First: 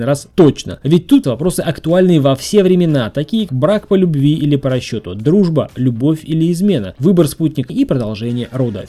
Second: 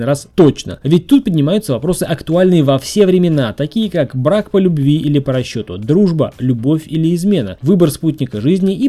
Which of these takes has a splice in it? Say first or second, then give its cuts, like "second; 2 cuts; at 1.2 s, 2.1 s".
first; 3 cuts; at 1.2 s, 3.5 s, 7.7 s